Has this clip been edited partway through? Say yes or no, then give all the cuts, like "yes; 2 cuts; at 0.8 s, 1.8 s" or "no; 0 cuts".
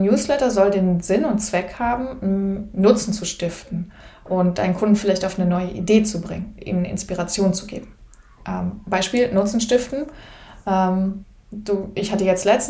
no; 0 cuts